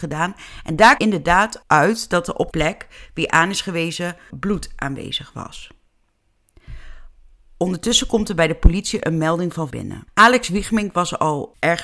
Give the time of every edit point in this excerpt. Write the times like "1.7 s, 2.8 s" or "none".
1.0 s, 2.5 s, 4.3 s, 9.7 s